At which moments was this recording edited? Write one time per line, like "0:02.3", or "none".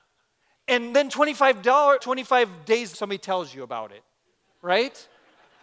0:02.0
0:02.9